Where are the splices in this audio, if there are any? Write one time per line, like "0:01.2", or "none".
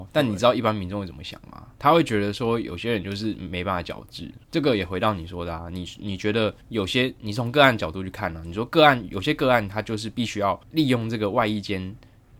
0:01.7
0:04.4
0:06.6
0:10.6